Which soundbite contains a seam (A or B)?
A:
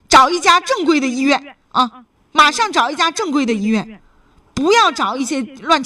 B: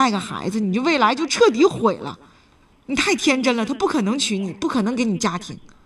A